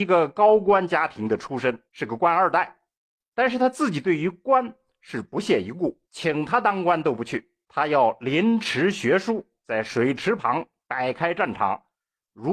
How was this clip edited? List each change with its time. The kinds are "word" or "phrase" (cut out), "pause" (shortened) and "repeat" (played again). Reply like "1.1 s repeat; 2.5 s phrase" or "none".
1.9 s pause; 3.0 s pause; 6.0 s pause; 7.6 s pause